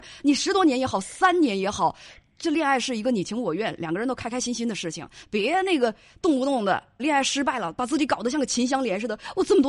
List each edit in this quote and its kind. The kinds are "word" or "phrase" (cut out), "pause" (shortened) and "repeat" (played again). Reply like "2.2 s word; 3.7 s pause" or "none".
7.0 s word